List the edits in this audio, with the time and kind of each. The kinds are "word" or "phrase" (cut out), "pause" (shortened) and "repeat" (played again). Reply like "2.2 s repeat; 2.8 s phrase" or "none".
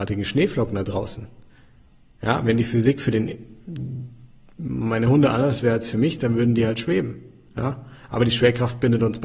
none